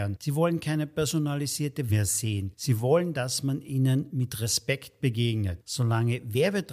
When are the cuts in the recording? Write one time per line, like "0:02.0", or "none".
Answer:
0:01.9